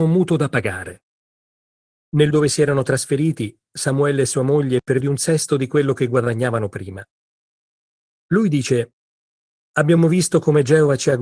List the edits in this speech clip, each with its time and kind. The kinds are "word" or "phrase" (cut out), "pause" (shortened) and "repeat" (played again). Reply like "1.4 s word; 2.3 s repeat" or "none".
2.3 s word; 5.0 s phrase